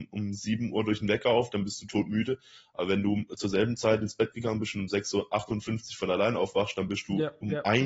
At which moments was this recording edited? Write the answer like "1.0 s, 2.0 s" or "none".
none